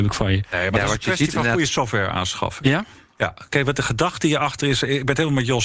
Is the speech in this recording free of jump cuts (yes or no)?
yes